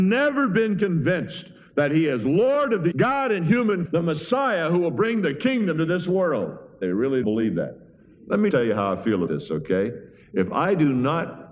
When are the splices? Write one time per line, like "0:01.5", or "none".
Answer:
0:02.9
0:03.9
0:07.2
0:08.5
0:09.3